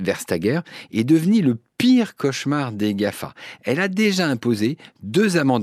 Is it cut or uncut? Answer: uncut